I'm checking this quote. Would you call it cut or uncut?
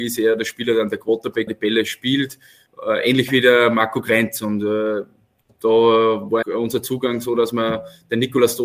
cut